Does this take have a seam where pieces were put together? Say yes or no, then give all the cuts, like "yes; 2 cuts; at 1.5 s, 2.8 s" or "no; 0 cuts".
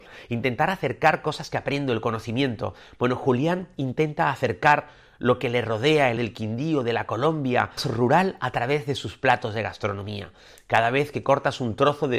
yes; 2 cuts; at 6.2 s, 7.8 s